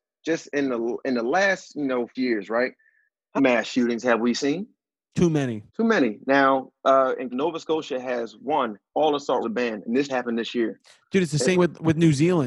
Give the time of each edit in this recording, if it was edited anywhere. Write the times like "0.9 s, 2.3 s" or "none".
2.1 s, 3.4 s, 5.7 s, 6.8 s, 7.3 s, 8.9 s, 9.4 s, 10.1 s, 11.5 s